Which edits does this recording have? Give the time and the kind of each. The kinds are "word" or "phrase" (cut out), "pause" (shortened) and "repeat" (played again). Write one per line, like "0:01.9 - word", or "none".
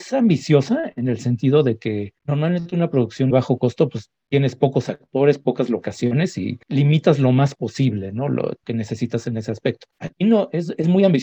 0:02.2 - pause
0:03.3 - phrase
0:06.6 - pause
0:08.6 - word
0:09.9 - pause